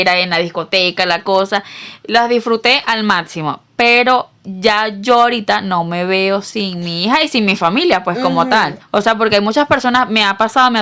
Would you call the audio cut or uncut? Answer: cut